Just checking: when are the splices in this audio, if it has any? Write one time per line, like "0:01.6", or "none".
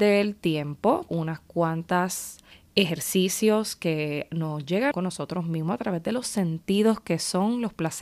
0:01.1
0:02.5
0:04.9
0:06.2